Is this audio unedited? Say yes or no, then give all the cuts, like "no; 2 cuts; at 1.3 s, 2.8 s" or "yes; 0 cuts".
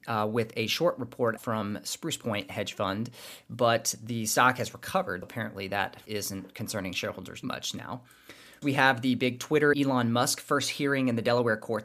no; 6 cuts; at 1.4 s, 5.2 s, 6.1 s, 7.4 s, 8.6 s, 9.7 s